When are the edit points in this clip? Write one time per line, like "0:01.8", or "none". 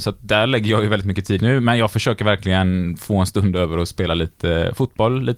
0:01.4